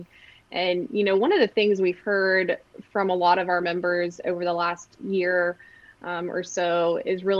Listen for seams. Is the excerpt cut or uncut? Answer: uncut